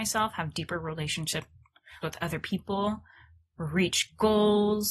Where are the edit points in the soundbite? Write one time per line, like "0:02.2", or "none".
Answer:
0:02.0